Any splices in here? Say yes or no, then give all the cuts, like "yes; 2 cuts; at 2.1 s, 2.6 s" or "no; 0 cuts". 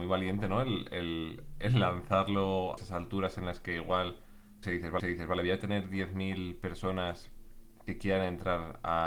yes; 3 cuts; at 2.8 s, 4.6 s, 5.0 s